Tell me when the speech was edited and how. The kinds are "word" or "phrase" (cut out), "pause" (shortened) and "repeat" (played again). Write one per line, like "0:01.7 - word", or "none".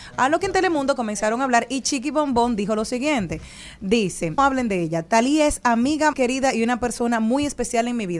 0:04.4 - word
0:06.1 - word